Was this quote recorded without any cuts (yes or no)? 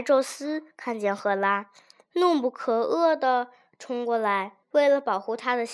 no